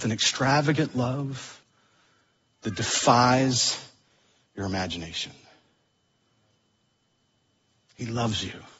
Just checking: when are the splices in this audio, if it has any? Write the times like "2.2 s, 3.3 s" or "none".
none